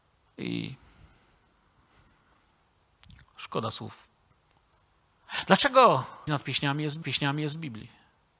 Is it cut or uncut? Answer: cut